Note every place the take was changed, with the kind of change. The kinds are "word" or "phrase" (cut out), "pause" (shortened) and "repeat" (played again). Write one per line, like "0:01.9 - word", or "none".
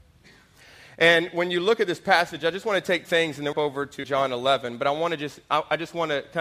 0:03.0 - word
0:03.5 - phrase
0:04.0 - word